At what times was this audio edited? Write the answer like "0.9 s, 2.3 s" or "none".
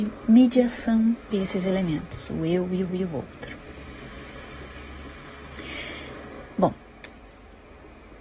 1.3 s, 2.9 s